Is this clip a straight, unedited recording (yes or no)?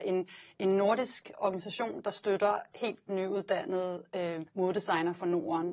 no